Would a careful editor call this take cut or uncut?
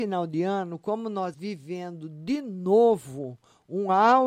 cut